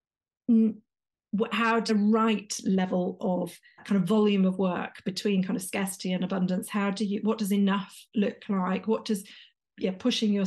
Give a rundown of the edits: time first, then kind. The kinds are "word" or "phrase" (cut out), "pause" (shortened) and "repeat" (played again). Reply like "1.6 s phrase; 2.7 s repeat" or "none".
1.9 s phrase; 3.8 s word